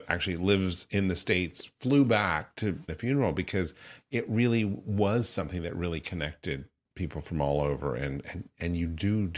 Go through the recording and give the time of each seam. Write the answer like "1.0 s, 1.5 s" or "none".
2.9 s